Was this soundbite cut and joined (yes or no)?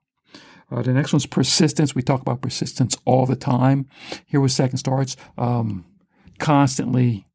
no